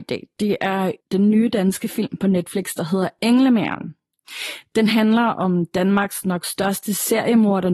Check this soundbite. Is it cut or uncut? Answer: cut